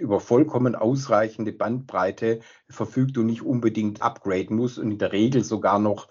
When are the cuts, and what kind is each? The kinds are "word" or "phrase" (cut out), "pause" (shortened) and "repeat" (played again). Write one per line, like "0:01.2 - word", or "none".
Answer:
none